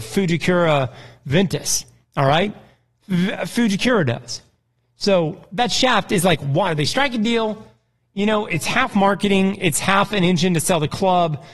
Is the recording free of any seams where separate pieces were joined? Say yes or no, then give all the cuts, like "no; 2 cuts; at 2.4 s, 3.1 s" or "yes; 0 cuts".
yes; 0 cuts